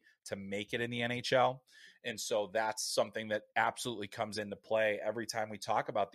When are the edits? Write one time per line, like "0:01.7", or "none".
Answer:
0:03.5